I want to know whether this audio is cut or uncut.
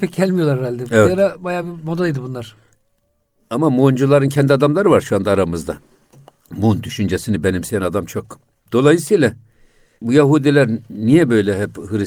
uncut